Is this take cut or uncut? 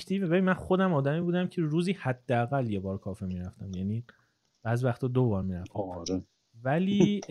uncut